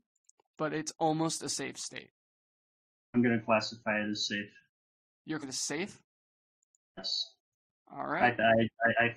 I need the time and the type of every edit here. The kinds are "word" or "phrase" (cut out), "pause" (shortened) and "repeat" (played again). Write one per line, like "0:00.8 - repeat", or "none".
0:05.4 - word